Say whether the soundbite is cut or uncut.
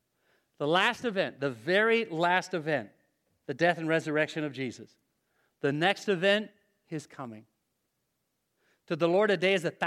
uncut